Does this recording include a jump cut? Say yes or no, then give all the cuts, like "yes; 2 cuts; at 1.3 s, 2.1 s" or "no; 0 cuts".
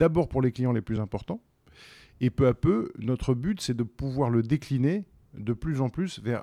no; 0 cuts